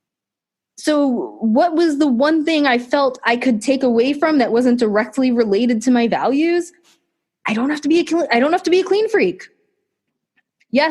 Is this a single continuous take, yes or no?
yes